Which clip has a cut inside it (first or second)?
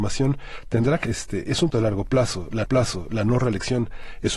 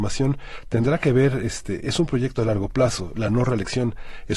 first